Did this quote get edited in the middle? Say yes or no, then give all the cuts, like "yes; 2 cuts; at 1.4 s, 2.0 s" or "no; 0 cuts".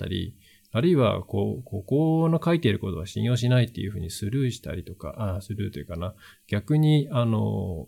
no; 0 cuts